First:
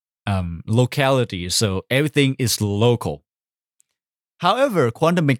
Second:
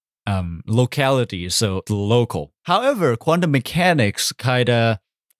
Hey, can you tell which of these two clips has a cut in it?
second; 2 cuts; at 1.9 s, 2.6 s

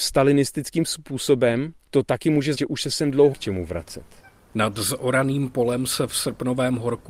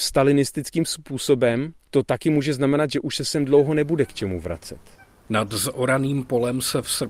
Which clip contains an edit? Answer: first; 2 cuts; at 2.5 s, 3.3 s

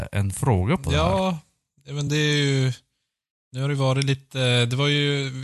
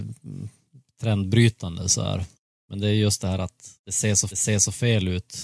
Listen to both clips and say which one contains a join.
second; 3 cuts; at 2.3 s, 3.8 s, 4.3 s

